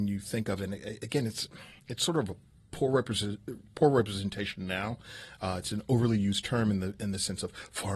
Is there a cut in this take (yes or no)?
no